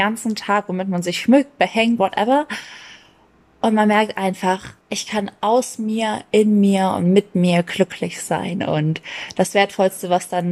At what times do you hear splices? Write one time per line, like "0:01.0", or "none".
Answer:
0:02.0
0:04.8